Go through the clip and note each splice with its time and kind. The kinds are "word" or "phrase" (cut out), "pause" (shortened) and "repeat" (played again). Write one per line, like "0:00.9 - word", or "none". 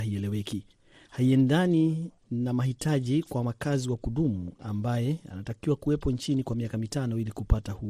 none